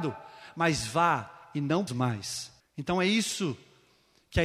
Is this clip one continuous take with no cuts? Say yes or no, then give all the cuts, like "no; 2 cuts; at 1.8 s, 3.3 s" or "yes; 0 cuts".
no; 2 cuts; at 1.9 s, 2.6 s